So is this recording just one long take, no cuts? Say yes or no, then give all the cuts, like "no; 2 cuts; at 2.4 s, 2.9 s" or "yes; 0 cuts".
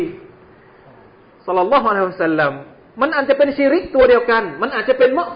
yes; 0 cuts